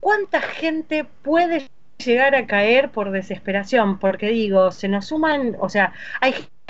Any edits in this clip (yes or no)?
no